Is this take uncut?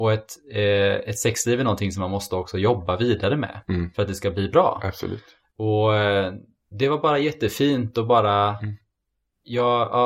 yes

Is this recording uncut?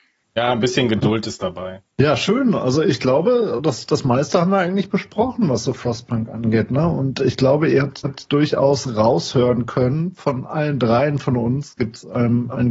no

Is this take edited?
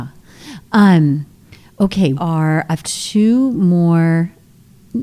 yes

